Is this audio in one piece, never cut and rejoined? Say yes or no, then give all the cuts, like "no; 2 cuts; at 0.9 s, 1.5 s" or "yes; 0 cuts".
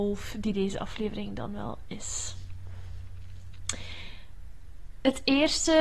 yes; 0 cuts